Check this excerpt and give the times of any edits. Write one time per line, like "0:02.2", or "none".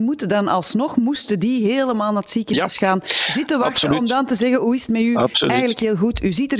none

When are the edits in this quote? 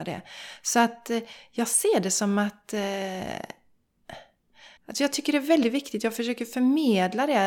0:04.8

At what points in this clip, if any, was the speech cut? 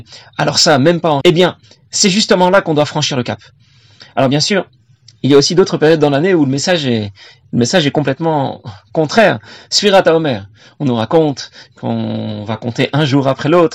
0:01.2

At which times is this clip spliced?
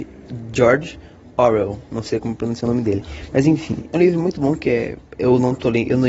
none

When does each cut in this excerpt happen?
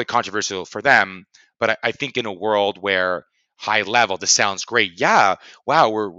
none

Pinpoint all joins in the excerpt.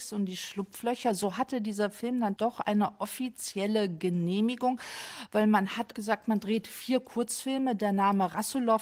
0:02.4
0:05.9

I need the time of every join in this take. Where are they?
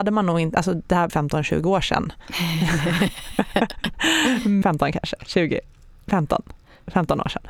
0:01.1
0:04.6

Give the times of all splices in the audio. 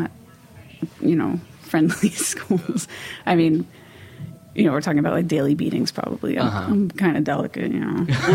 0:00.9

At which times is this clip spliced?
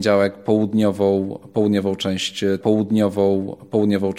0:02.6

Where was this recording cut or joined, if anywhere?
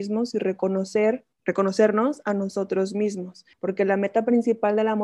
0:01.3
0:03.5

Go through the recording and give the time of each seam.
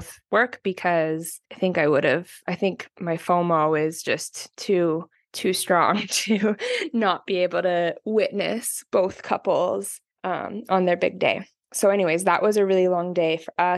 0:01.4
0:05.1
0:10.1

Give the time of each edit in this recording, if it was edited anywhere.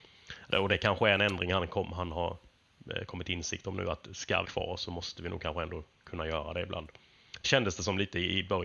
0:04.4
0:07.4

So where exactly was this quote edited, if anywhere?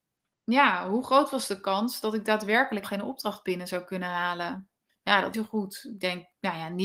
0:02.8
0:04.9
0:05.3

